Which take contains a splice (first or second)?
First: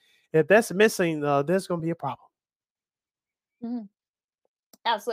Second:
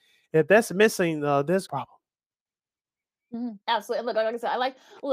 second